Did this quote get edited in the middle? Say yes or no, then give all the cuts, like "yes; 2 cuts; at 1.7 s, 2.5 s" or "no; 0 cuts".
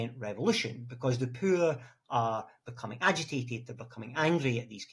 no; 0 cuts